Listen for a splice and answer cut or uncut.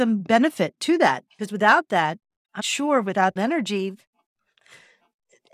cut